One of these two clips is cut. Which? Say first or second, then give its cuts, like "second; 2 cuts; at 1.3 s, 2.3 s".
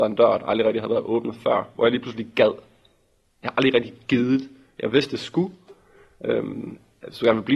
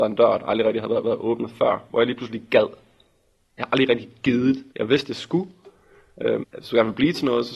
second; 3 cuts; at 1.0 s, 4.7 s, 6.4 s